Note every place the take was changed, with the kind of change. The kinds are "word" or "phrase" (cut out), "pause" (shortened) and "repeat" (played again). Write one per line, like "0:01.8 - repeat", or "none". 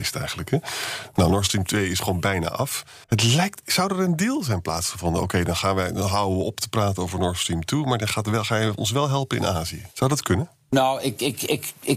0:03.0 - pause
0:09.9 - pause